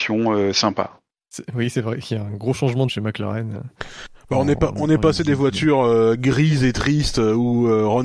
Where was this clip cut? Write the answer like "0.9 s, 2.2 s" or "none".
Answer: 2.9 s